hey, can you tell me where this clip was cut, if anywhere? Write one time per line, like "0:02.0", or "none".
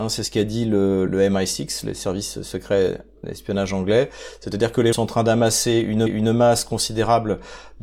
0:01.1
0:03.2
0:04.9
0:06.1